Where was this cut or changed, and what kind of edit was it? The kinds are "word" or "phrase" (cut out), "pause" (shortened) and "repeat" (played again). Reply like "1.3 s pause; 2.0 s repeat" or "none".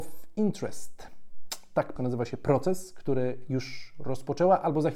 2.0 s word